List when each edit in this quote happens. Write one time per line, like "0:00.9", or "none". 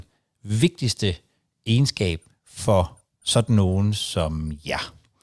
none